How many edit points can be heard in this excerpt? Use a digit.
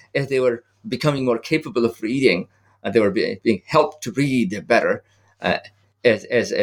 0